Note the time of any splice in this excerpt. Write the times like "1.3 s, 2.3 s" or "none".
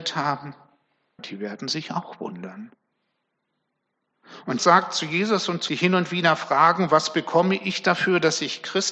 1.2 s, 4.6 s, 5.7 s